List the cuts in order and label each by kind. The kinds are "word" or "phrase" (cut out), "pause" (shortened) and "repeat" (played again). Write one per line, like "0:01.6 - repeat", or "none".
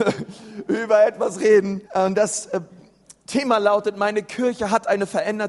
0:01.8 - pause
0:03.2 - pause